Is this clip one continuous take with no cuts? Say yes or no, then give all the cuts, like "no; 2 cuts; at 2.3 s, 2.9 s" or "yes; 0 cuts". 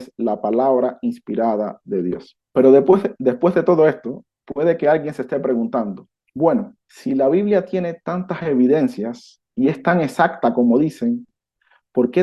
no; 3 cuts; at 2.5 s, 6.8 s, 9.5 s